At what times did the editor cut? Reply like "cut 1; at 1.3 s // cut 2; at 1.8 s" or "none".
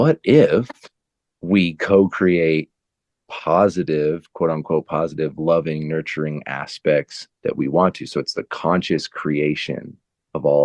none